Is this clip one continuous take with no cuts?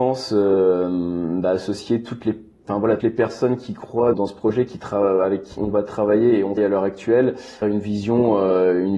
no; 5 cuts; at 3.0 s, 4.1 s, 5.6 s, 6.6 s, 7.6 s

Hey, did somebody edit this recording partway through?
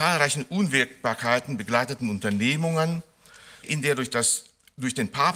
yes; 1 cut; at 3.6 s

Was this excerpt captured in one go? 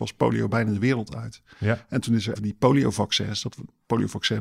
no; 1 cut; at 2.4 s

